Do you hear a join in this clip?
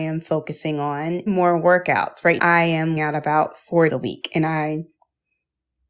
yes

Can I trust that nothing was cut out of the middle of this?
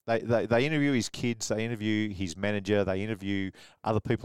yes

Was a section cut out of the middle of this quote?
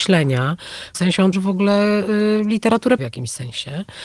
yes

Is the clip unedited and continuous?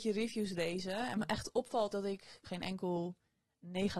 no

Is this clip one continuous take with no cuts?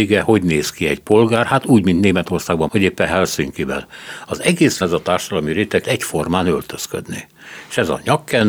no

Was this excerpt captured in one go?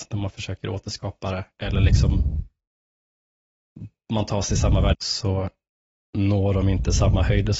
no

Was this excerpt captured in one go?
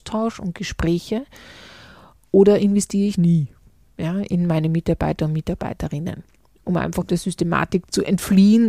yes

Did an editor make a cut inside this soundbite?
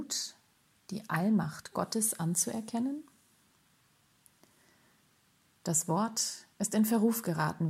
no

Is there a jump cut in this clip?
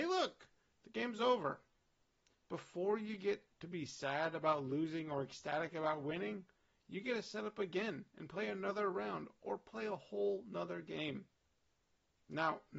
no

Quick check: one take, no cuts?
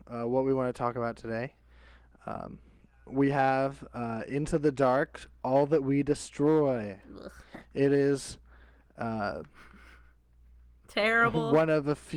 yes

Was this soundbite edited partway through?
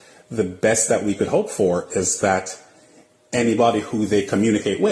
no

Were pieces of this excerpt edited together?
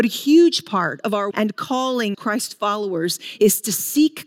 yes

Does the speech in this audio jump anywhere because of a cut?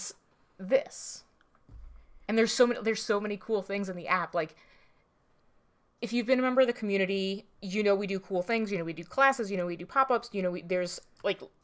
yes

